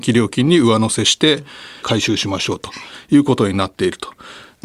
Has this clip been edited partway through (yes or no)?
yes